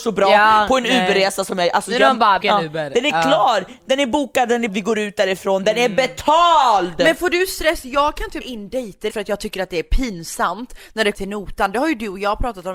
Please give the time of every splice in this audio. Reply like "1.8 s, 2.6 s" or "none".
2.4 s, 4.7 s, 8.4 s, 9.1 s, 11.1 s